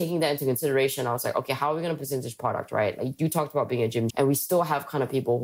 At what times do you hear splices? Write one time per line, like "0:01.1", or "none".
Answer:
0:04.1